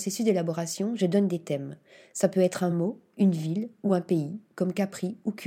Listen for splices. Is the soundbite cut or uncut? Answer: uncut